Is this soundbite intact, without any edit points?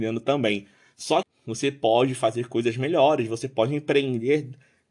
no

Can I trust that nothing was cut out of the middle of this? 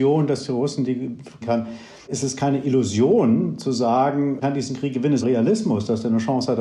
no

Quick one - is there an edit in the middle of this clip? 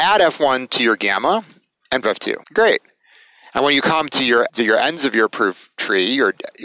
yes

